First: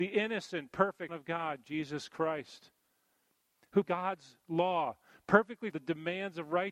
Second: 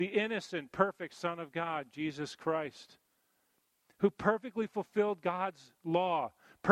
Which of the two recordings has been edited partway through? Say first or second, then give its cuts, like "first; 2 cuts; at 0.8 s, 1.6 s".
first; 3 cuts; at 1.1 s, 3.8 s, 5.7 s